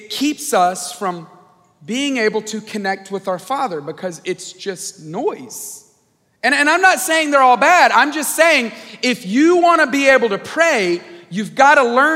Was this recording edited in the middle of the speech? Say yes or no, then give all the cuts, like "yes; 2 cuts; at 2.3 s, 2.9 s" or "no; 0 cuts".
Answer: no; 0 cuts